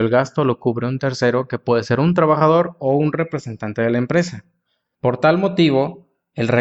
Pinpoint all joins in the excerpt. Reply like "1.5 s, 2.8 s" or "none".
none

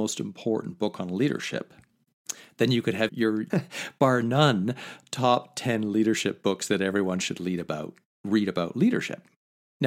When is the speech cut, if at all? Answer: 3.1 s, 3.5 s

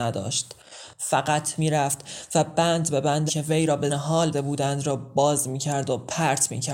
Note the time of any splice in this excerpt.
1.6 s, 3.3 s, 3.9 s, 4.3 s

